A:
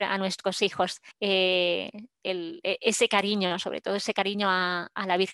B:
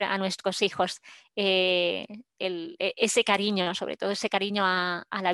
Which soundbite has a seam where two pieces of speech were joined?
A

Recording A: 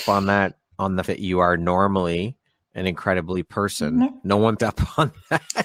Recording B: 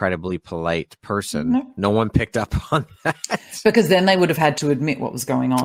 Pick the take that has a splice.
A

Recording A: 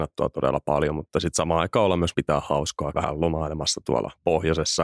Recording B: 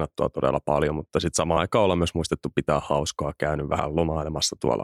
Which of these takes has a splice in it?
A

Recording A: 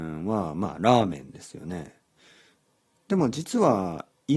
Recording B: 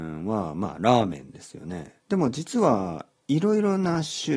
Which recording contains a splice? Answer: B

